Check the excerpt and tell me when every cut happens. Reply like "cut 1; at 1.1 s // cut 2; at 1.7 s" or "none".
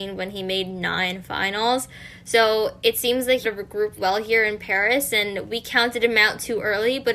cut 1; at 3.4 s // cut 2; at 4.0 s